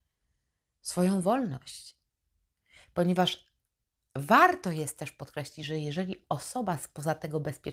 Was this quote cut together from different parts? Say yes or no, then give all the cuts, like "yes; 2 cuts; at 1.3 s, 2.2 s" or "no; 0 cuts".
no; 0 cuts